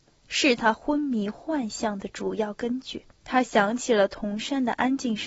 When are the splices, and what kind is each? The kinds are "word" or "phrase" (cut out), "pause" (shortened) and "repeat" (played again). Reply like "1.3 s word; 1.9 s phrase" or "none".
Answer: 3.1 s pause